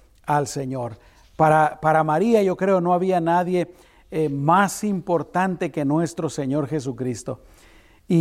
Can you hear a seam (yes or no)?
no